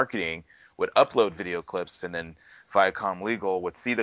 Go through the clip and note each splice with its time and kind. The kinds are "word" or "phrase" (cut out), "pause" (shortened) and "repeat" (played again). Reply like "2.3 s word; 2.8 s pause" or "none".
none